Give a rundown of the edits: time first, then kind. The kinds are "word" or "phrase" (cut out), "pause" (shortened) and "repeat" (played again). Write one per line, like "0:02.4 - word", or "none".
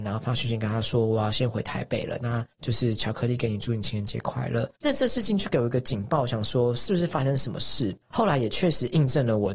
0:02.5 - pause
0:04.8 - pause